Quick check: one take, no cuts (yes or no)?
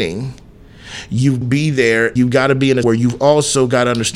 no